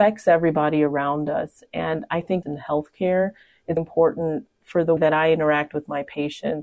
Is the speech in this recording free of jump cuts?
no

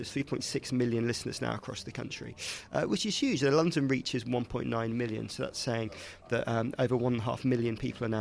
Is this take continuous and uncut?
yes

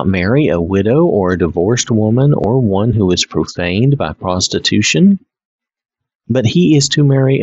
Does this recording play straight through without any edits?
yes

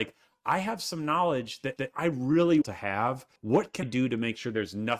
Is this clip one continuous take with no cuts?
no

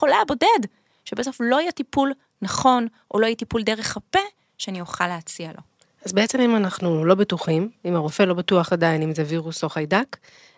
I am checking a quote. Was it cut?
no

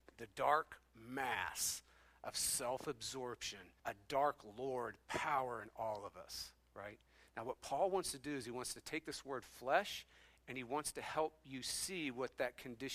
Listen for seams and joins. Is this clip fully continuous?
no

